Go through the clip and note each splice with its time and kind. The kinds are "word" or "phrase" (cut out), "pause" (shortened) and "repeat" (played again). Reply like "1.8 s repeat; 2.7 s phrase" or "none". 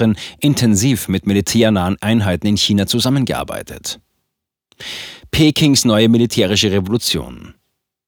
none